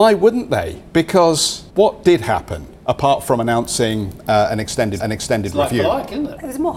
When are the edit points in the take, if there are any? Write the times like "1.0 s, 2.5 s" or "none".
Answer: 1.7 s, 5.0 s